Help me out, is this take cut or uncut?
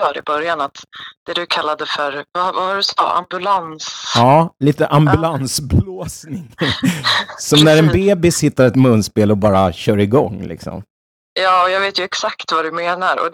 uncut